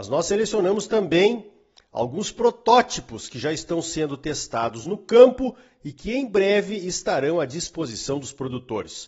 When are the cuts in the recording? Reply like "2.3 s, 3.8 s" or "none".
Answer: none